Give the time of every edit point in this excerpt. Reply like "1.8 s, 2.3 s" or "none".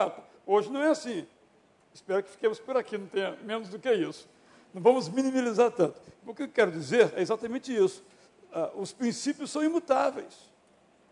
none